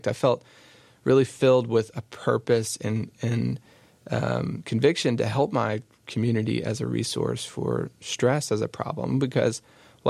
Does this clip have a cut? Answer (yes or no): no